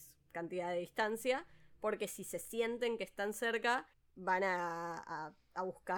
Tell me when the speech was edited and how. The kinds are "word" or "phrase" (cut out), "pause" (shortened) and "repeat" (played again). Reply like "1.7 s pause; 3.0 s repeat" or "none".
3.9 s pause